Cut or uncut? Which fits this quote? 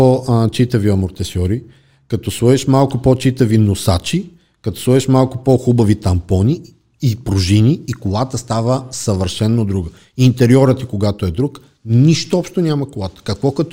uncut